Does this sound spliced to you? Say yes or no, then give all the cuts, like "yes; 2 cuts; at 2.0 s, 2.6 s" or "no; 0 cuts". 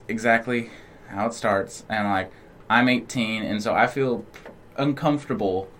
no; 0 cuts